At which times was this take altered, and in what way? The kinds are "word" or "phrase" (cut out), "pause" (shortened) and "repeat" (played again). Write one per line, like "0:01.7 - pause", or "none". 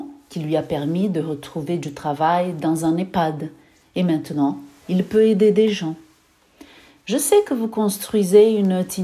none